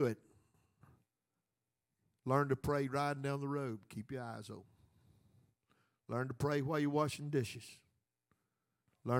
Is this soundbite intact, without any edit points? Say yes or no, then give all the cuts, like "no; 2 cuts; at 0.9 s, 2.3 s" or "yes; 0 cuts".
yes; 0 cuts